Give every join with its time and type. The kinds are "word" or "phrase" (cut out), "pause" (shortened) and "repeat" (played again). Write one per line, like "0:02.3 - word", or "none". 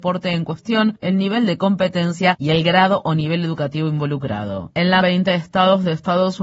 0:05.0 - word